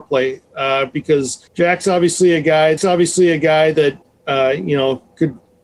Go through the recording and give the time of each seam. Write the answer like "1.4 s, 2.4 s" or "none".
1.5 s, 2.8 s